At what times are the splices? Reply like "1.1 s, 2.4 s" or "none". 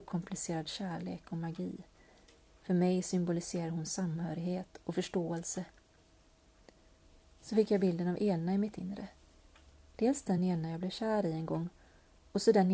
none